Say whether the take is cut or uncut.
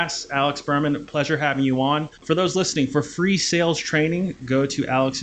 cut